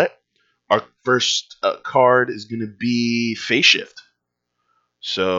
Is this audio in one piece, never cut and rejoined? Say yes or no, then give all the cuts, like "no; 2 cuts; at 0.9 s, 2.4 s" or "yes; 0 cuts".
yes; 0 cuts